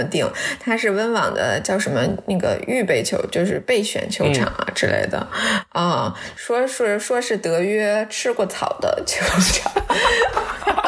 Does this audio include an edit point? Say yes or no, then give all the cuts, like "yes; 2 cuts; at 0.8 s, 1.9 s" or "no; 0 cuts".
no; 0 cuts